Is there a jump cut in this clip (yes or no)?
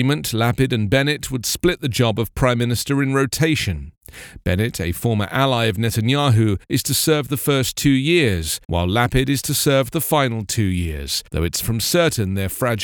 yes